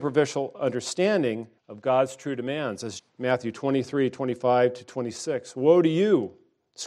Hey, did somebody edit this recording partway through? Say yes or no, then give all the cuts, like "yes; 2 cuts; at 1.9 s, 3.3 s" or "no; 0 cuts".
yes; 2 cuts; at 1.6 s, 3.0 s